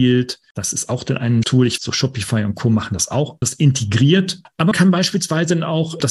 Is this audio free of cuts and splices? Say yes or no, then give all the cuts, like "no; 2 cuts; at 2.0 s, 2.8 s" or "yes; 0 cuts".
no; 4 cuts; at 1.4 s, 1.8 s, 3.4 s, 4.7 s